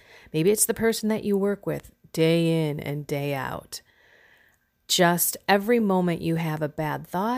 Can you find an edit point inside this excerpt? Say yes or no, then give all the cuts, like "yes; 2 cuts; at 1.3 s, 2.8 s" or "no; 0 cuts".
no; 0 cuts